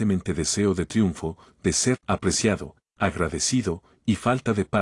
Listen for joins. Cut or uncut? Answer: cut